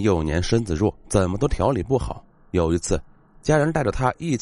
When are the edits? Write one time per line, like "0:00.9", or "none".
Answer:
0:01.0
0:02.3